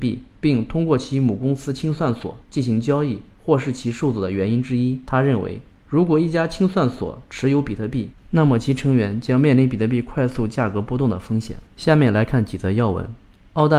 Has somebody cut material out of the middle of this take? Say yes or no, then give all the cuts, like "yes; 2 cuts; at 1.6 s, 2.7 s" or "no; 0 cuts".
yes; 1 cut; at 11.7 s